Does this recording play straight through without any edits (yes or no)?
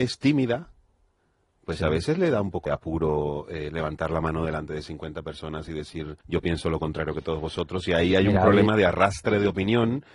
no